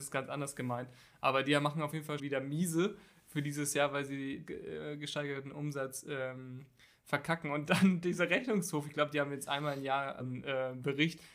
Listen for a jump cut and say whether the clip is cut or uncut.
cut